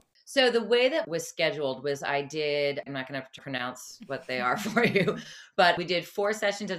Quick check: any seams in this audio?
yes; 3 cuts; at 1.0 s, 2.9 s, 3.4 s

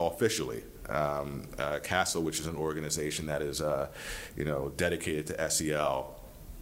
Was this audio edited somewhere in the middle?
no; 0 cuts

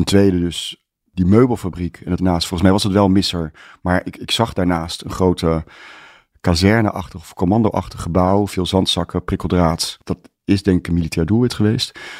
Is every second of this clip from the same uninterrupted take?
no; 1 cut; at 2.2 s

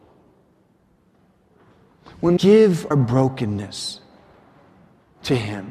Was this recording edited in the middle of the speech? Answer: yes; 2 cuts; at 2.4 s, 2.9 s

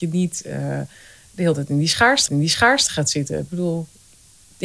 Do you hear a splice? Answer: yes; 1 cut; at 2.3 s

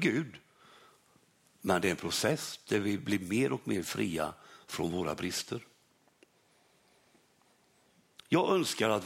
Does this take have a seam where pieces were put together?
no; 0 cuts

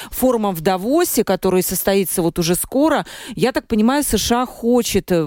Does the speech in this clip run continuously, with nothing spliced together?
yes; 0 cuts

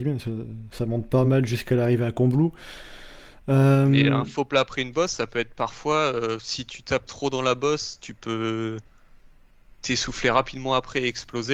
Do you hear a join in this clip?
no; 0 cuts

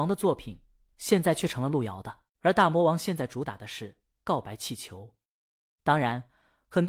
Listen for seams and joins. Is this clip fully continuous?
no; 1 cut; at 2.3 s

